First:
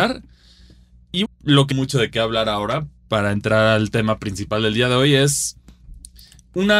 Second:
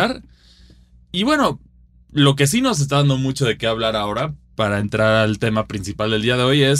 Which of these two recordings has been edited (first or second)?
first